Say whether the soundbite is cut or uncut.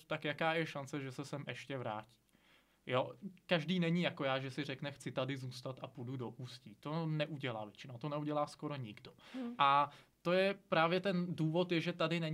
uncut